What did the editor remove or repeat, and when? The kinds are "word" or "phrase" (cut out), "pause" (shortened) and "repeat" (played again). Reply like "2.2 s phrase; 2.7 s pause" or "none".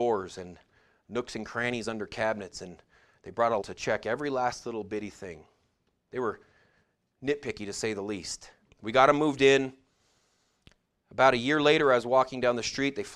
3.6 s word; 8.7 s pause